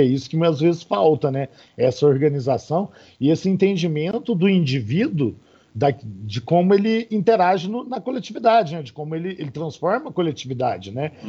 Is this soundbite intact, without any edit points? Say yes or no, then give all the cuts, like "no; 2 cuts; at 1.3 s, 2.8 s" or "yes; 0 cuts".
yes; 0 cuts